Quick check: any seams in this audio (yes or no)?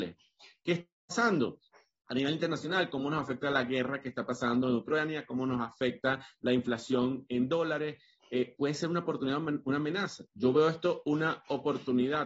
no